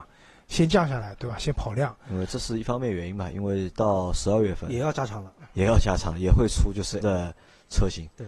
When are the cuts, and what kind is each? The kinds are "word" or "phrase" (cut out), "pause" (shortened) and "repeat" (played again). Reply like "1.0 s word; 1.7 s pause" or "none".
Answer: 3.7 s word; 7.0 s word

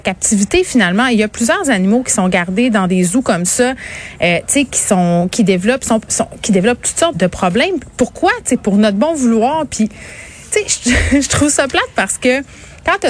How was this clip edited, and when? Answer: 7.1 s word

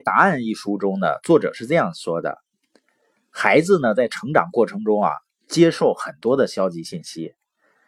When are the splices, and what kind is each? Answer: none

